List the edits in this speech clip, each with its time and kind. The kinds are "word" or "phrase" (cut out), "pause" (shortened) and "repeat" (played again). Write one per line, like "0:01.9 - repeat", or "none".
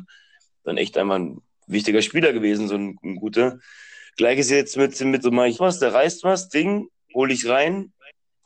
0:05.2 - phrase
0:05.5 - phrase